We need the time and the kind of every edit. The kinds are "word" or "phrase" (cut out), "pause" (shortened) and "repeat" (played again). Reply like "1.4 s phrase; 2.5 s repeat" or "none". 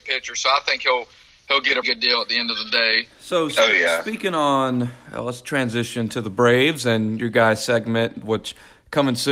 1.8 s word